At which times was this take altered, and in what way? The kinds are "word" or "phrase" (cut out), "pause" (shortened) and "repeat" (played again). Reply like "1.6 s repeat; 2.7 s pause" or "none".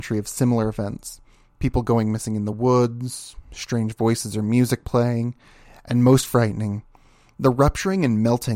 none